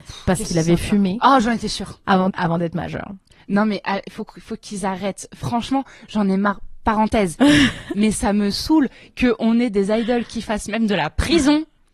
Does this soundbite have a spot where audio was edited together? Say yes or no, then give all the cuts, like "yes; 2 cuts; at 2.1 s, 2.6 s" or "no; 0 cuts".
yes; 1 cut; at 2.3 s